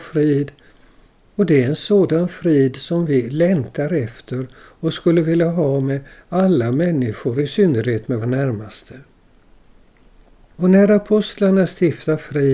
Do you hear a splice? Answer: yes; 1 cut; at 8.2 s

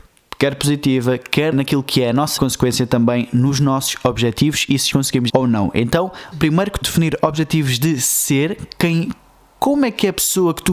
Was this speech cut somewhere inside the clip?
yes; 6 cuts; at 1.5 s, 2.4 s, 4.9 s, 5.3 s, 6.3 s, 6.8 s

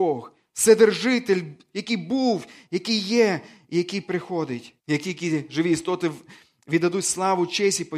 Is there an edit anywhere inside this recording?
yes; 1 cut; at 4.8 s

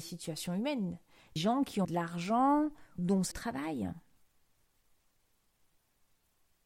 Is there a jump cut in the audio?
yes; 4 cuts; at 1.4 s, 1.8 s, 3.0 s, 3.3 s

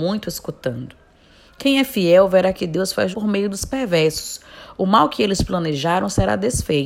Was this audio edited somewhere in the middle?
yes; 1 cut; at 3.1 s

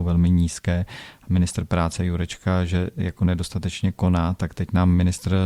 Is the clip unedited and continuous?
yes; 0 cuts

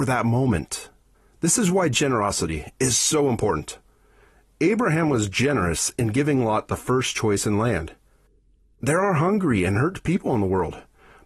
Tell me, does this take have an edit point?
no; 0 cuts

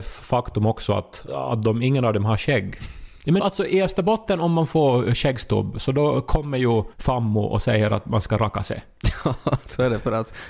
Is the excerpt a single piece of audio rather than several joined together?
no; 3 cuts; at 1.3 s, 3.4 s, 6.9 s

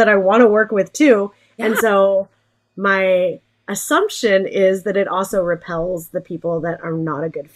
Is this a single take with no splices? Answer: yes; 0 cuts

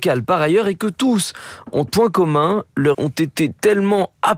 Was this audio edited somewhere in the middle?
yes; 2 cuts; at 1.9 s, 2.9 s

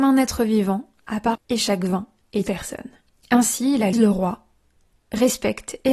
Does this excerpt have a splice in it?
yes; 3 cuts; at 1.3 s, 2.5 s, 3.9 s

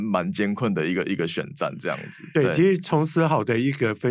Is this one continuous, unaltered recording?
no; 1 cut; at 2.3 s

